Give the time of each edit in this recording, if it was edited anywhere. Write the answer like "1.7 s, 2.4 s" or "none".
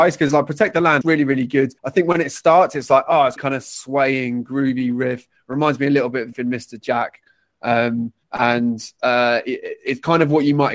1.0 s, 1.8 s, 3.4 s, 6.3 s, 8.2 s